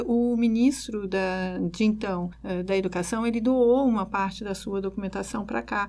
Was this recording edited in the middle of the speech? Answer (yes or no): no